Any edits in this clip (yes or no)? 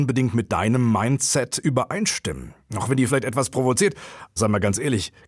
yes